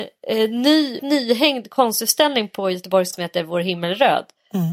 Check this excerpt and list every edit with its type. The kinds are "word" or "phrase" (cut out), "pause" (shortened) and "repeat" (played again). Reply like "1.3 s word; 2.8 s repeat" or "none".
1.0 s word; 3.1 s word